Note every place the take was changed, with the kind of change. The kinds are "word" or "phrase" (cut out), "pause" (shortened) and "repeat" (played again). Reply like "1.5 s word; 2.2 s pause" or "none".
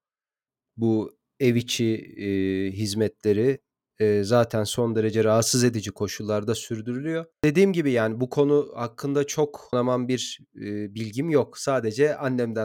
7.3 s pause; 9.7 s word